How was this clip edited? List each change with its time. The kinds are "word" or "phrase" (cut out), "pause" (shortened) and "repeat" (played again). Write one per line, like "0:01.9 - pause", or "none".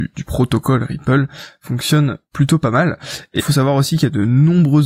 0:03.4 - phrase